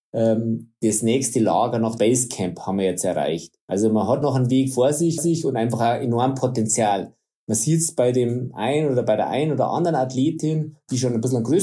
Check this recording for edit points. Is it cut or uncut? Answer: cut